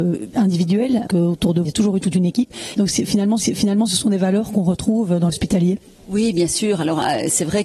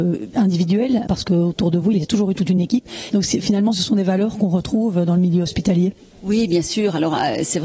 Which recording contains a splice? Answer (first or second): first